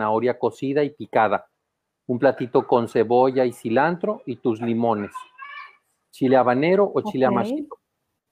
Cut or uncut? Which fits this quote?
uncut